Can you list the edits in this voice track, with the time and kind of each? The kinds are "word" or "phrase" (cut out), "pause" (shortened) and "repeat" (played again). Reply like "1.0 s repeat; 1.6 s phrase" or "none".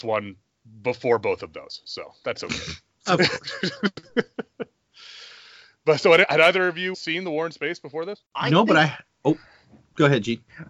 6.9 s word; 8.3 s pause